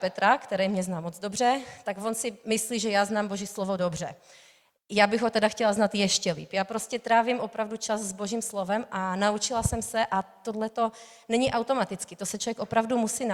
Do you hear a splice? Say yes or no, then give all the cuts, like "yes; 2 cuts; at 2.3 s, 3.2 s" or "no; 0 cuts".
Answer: no; 0 cuts